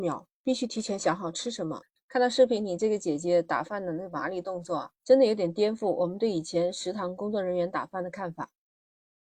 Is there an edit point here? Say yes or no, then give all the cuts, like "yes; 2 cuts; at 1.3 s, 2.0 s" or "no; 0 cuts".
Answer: yes; 2 cuts; at 2.0 s, 4.9 s